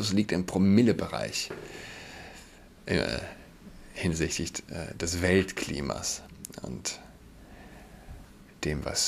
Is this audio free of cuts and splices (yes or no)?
yes